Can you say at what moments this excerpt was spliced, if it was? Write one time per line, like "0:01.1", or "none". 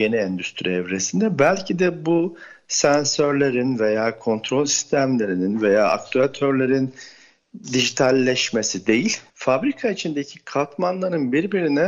0:09.3